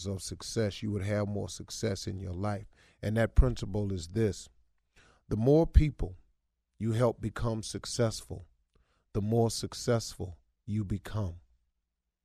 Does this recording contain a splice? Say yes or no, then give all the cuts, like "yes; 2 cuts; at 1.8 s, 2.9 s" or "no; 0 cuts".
no; 0 cuts